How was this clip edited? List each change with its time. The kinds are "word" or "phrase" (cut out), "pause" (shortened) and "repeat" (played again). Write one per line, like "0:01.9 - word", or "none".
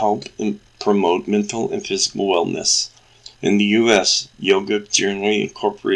0:03.3 - pause